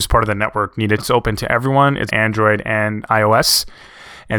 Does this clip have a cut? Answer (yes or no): yes